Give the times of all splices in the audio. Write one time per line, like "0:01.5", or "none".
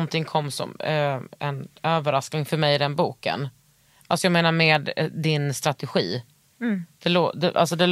none